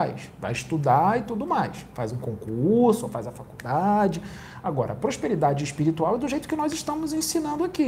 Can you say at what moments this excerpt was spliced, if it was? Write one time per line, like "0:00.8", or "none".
none